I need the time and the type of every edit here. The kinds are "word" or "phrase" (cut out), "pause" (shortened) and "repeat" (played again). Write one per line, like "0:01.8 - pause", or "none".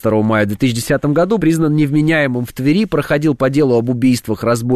0:01.4 - word

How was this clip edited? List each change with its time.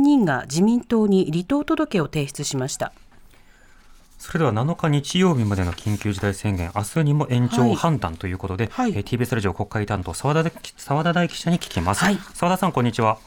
none

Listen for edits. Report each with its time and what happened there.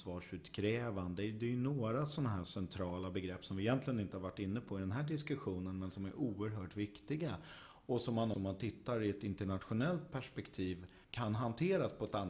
0:08.3 - word
0:11.0 - pause

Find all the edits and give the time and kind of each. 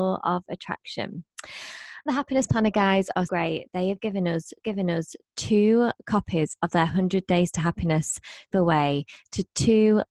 0:02.1 - word
0:03.3 - word
0:04.6 - repeat
0:08.5 - phrase

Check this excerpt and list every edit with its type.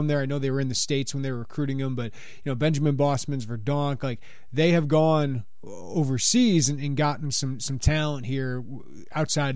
none

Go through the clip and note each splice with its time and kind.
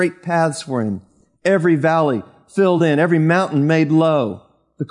none

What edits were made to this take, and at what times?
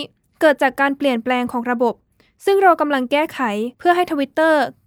0:03.7 - pause

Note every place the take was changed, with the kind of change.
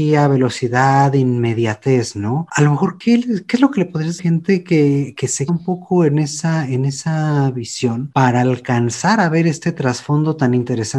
0:04.2 - phrase
0:05.5 - word

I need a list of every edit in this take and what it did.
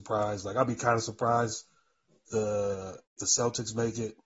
0:02.3 - word
0:03.2 - word

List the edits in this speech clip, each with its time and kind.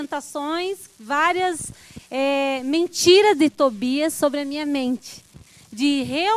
0:00.9 - pause

